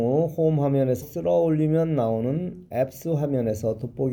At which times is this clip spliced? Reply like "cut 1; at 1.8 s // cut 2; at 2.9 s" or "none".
cut 1; at 1.0 s